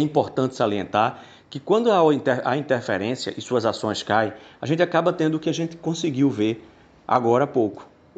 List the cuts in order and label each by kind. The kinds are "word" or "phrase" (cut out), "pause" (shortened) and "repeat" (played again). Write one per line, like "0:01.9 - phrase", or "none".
none